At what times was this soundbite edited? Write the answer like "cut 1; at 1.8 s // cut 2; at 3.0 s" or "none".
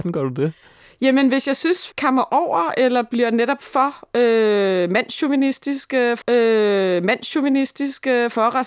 cut 1; at 1.9 s // cut 2; at 6.2 s